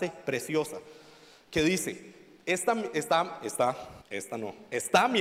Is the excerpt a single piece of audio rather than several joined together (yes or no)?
no